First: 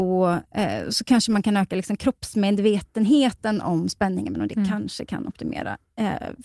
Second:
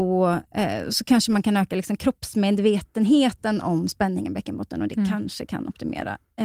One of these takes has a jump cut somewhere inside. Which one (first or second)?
first